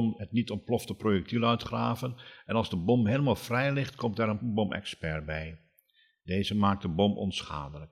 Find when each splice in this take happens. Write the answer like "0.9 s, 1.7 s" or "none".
none